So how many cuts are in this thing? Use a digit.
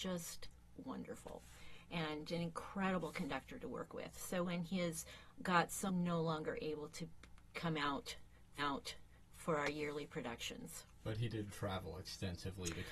5